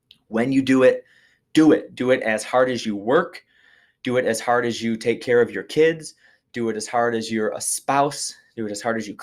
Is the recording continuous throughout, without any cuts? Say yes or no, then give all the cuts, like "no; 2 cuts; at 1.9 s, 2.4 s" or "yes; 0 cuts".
yes; 0 cuts